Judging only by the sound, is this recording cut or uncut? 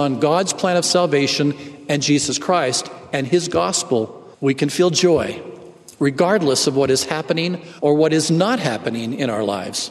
cut